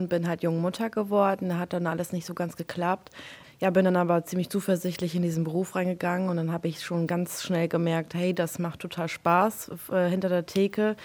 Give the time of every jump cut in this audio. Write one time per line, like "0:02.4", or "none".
none

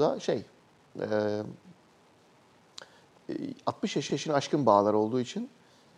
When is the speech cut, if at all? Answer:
0:04.1

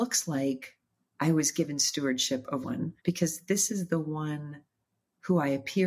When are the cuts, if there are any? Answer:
0:02.6
0:03.0

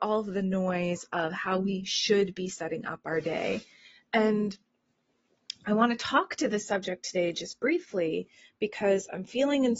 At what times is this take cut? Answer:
none

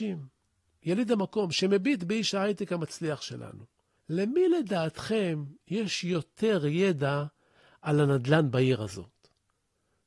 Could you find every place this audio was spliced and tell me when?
none

